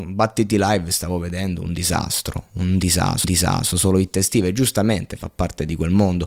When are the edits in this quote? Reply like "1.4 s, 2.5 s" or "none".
3.2 s